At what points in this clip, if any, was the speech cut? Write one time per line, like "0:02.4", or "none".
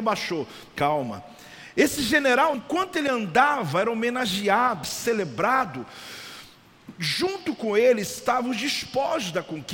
0:02.5
0:04.8